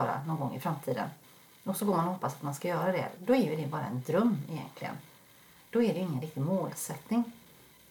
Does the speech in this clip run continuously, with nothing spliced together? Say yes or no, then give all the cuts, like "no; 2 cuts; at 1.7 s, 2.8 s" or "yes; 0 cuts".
yes; 0 cuts